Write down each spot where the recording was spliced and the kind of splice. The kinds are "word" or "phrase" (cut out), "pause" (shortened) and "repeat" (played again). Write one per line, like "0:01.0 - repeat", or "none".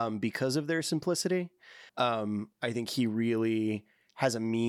0:01.9 - pause